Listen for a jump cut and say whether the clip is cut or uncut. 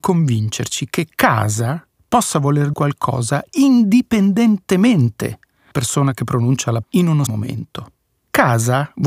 cut